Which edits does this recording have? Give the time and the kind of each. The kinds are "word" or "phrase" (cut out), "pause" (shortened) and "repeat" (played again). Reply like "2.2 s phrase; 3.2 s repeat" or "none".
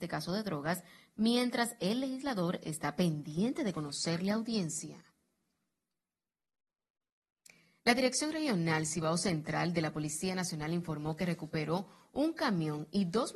none